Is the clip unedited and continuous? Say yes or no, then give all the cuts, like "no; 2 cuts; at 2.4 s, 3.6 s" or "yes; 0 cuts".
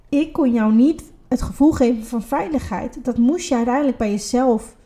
yes; 0 cuts